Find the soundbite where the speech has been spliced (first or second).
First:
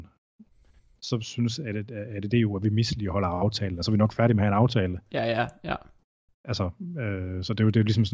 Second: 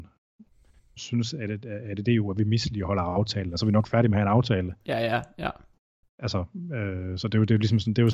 second